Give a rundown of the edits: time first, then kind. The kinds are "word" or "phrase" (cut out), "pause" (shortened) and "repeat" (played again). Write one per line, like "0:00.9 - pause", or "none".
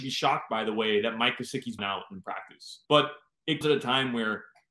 0:01.8 - word
0:02.9 - pause
0:03.6 - word